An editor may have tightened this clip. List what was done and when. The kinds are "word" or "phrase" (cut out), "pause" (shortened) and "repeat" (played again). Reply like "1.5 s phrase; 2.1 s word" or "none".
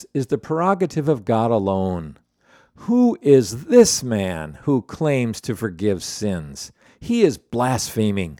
none